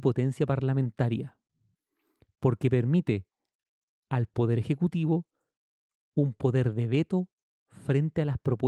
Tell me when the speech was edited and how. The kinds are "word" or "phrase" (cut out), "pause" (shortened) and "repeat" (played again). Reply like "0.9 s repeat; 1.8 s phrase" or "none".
none

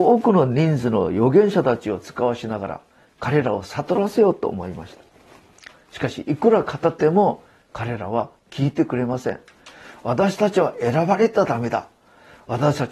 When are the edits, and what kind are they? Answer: none

